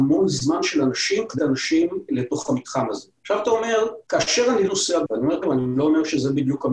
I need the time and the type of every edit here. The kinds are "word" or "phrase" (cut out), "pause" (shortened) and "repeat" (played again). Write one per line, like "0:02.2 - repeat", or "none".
0:01.4 - word
0:02.1 - word
0:03.1 - pause
0:04.0 - pause
0:04.7 - word
0:05.1 - word
0:05.4 - word